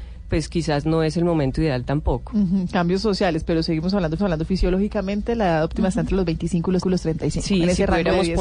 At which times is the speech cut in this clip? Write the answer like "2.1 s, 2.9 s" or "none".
4.2 s, 6.8 s

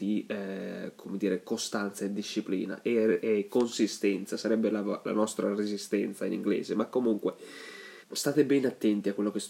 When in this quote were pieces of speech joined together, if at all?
8.0 s

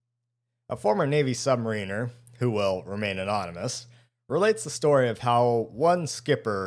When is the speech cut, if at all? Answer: none

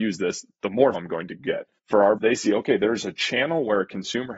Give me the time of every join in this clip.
0.9 s, 1.8 s, 2.2 s

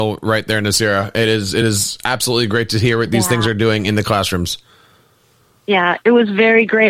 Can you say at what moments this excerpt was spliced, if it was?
none

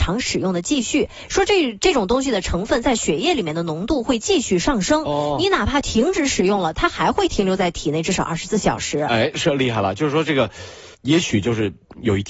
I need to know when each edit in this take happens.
10.9 s

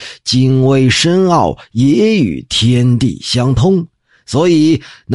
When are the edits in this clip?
none

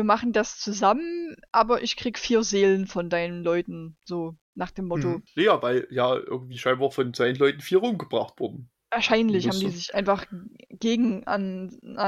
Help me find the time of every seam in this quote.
none

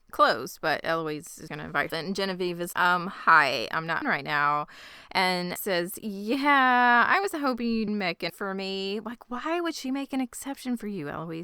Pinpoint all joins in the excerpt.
1.5 s, 1.9 s, 2.7 s, 3.7 s, 4.0 s, 5.6 s, 7.9 s, 8.3 s

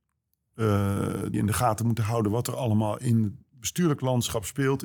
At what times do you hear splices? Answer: 1.3 s

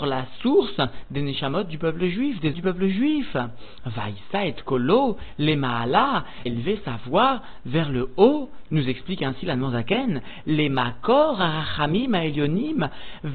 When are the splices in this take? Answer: 2.5 s, 6.5 s, 8.7 s

